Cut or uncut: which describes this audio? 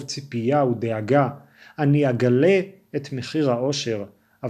uncut